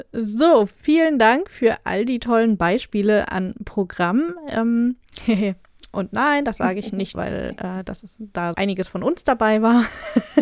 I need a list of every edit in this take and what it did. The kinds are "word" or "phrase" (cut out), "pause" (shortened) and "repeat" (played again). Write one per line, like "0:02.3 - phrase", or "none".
0:07.1 - word
0:08.5 - word